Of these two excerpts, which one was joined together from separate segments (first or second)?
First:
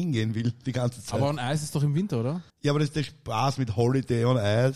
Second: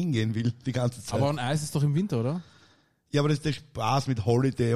first